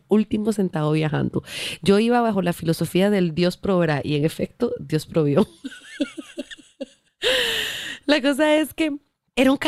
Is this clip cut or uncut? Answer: uncut